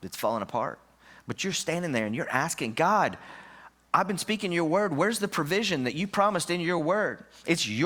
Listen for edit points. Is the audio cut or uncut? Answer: uncut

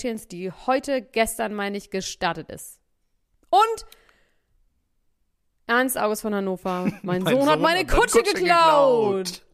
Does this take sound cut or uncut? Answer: uncut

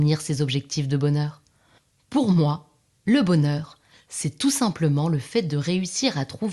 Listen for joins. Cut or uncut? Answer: uncut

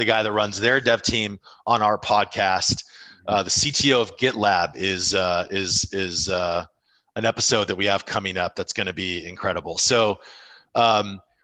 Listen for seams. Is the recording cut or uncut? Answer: uncut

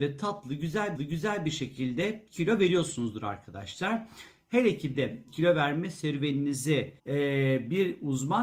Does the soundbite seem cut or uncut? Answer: cut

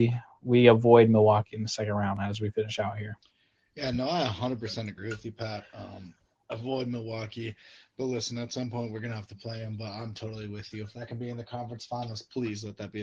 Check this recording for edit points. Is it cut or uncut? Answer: uncut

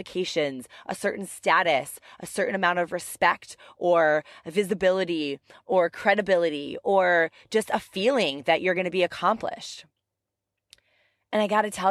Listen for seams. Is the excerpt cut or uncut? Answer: uncut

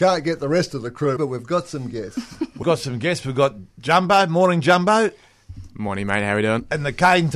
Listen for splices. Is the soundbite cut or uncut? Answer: cut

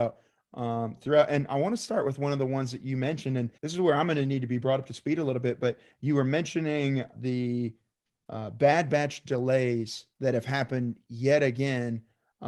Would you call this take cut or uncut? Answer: cut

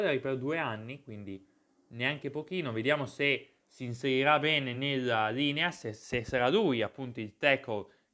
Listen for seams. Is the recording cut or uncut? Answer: uncut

